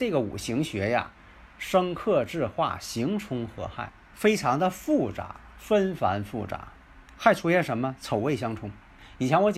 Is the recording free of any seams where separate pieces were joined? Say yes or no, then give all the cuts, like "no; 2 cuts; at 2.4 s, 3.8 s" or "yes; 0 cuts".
no; 1 cut; at 7.1 s